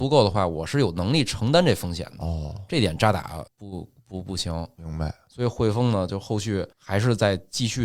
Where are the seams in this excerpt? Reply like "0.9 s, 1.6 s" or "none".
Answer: 3.5 s, 6.7 s

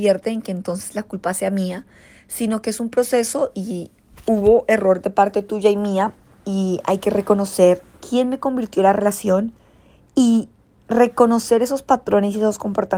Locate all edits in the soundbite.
none

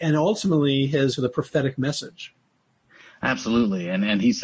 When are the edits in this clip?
1.1 s

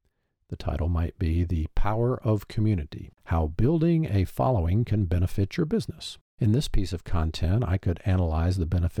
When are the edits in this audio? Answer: 3.2 s, 6.3 s

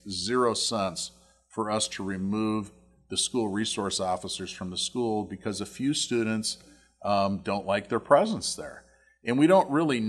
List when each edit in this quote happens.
none

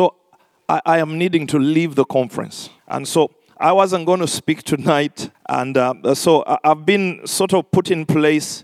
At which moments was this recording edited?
2.8 s, 5.3 s

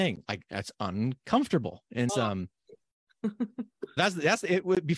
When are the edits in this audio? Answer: 2.1 s, 4.0 s

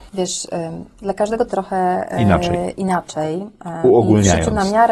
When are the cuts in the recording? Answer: 1.5 s

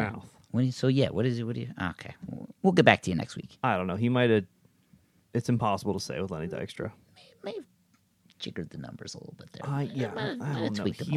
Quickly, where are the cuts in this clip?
none

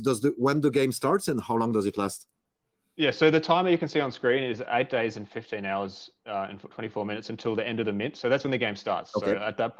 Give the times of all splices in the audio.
none

